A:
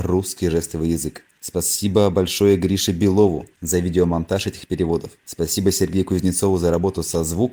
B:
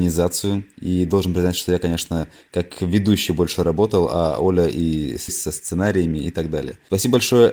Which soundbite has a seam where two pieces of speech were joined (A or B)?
B